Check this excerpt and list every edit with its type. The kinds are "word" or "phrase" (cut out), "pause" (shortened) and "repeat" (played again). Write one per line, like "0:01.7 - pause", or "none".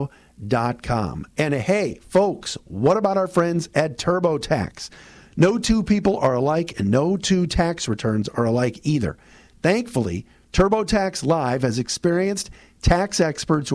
none